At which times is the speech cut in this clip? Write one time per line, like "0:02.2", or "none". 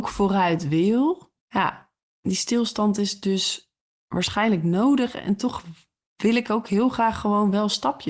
0:01.4